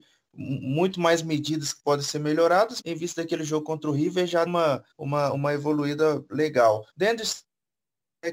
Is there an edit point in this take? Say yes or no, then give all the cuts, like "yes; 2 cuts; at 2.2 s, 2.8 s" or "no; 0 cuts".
yes; 4 cuts; at 2.8 s, 4.5 s, 4.9 s, 6.9 s